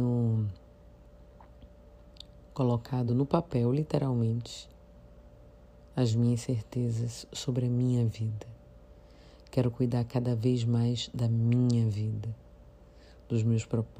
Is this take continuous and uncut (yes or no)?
yes